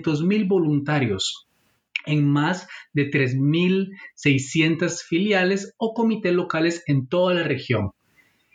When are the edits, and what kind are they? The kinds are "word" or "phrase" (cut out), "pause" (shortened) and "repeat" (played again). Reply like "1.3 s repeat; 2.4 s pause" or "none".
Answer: none